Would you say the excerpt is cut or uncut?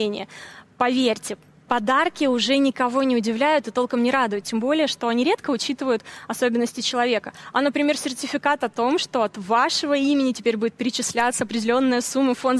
uncut